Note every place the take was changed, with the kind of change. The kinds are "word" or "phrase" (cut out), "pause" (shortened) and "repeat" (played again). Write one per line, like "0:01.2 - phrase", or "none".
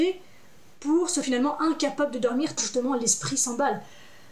0:01.2 - word
0:02.6 - word